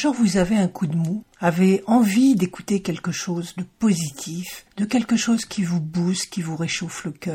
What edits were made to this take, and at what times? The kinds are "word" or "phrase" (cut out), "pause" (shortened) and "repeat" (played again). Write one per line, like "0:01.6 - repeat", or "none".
none